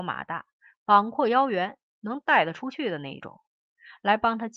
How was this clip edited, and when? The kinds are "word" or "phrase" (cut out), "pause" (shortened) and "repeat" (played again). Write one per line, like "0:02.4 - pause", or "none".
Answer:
none